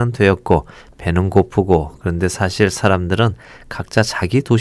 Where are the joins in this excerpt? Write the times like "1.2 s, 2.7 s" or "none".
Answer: none

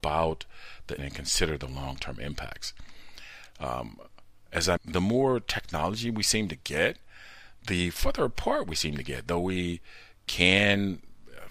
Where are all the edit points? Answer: 1.0 s, 4.8 s

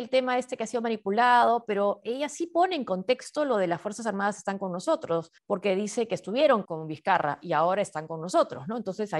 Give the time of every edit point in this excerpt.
5.4 s, 6.6 s

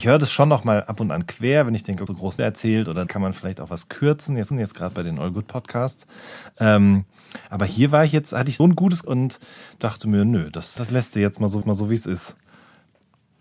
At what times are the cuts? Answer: 2.1 s, 2.4 s, 3.1 s, 4.5 s, 8.6 s, 9.0 s, 10.8 s, 11.6 s

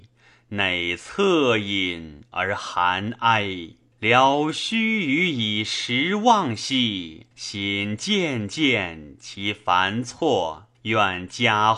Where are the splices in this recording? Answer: 3.9 s, 7.3 s, 10.7 s

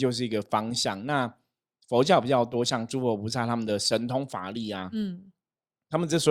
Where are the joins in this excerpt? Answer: none

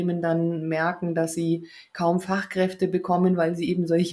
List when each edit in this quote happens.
none

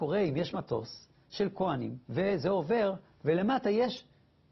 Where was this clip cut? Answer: 2.0 s

